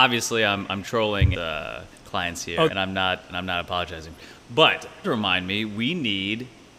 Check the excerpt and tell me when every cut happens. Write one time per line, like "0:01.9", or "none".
0:01.3
0:01.9
0:02.7
0:04.2
0:05.0